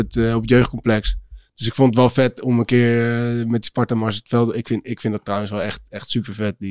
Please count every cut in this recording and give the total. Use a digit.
0